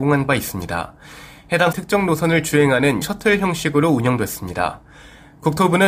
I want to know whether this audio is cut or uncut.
cut